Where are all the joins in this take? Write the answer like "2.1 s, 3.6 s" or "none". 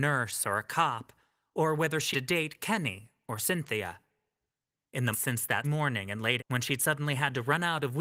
2.1 s, 5.1 s, 5.6 s, 6.4 s